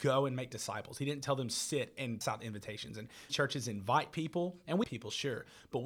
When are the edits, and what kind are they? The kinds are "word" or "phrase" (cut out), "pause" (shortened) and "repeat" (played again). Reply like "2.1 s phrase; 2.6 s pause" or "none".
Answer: 2.2 s word; 3.3 s word; 4.8 s word